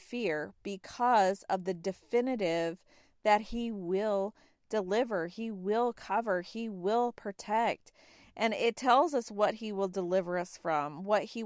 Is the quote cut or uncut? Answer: uncut